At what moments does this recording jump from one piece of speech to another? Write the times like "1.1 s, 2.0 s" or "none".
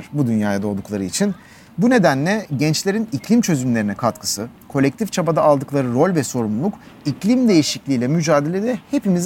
none